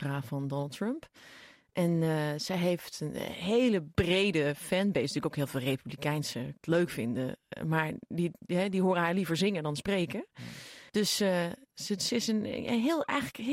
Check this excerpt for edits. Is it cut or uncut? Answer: cut